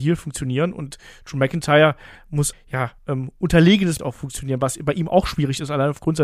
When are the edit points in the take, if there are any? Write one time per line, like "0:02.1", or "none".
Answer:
0:02.5
0:03.0
0:04.0